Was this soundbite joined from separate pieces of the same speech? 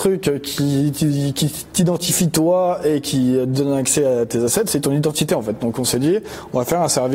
no; 0 cuts

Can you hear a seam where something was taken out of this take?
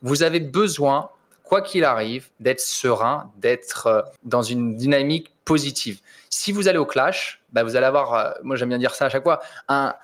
yes; 2 cuts; at 2.3 s, 4.2 s

